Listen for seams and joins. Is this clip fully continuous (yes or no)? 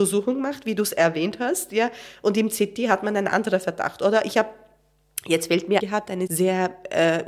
no